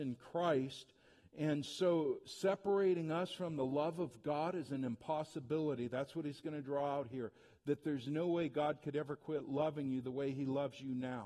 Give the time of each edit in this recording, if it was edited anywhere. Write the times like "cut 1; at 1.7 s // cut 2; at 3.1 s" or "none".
none